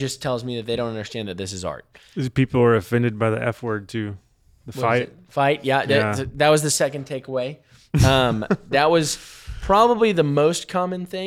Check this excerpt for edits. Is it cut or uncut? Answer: uncut